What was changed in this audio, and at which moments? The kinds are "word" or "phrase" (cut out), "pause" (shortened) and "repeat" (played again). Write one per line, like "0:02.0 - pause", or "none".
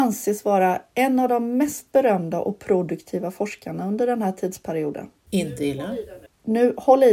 0:05.2 - pause